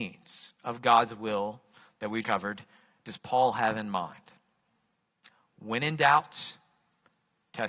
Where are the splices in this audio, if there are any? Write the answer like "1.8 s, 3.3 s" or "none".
2.2 s